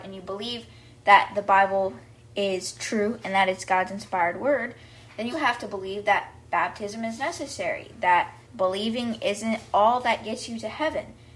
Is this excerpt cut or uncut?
cut